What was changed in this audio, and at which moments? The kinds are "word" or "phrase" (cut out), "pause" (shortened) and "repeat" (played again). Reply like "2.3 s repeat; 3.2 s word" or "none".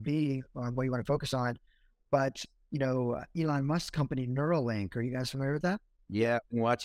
none